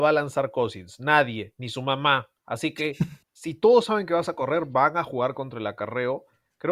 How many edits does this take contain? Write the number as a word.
two